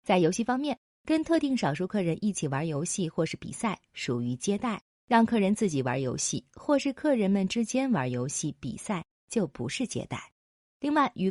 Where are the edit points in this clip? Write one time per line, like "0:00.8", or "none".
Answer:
none